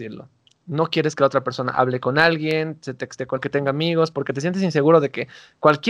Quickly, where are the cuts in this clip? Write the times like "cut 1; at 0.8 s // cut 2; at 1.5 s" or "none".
cut 1; at 3.4 s